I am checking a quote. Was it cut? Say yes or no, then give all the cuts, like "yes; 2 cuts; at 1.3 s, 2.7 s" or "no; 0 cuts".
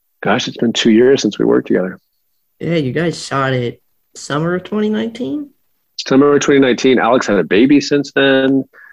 no; 0 cuts